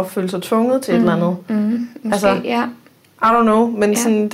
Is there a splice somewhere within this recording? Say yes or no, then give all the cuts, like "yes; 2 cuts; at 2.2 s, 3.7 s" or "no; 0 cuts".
no; 0 cuts